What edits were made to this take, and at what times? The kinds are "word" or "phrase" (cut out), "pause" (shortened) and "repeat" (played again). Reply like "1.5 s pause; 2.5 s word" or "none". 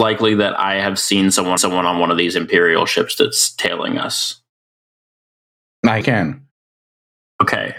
1.6 s repeat; 6.0 s phrase